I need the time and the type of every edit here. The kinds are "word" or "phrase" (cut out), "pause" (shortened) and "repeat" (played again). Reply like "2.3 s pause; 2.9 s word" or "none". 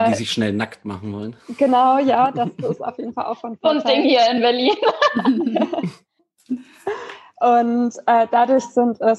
none